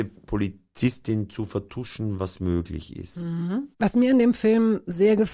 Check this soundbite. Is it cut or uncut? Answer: cut